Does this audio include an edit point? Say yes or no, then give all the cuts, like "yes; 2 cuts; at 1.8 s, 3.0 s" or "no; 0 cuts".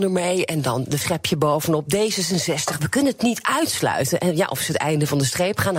yes; 1 cut; at 1.0 s